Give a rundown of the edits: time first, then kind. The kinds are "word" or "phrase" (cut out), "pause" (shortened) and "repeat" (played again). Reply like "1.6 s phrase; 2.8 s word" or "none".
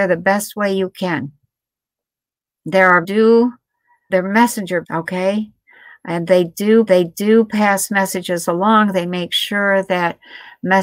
3.0 s phrase; 4.1 s word; 4.8 s word; 6.9 s repeat